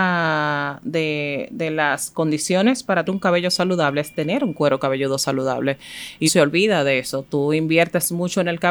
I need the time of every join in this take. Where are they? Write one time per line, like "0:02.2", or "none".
0:03.1
0:06.3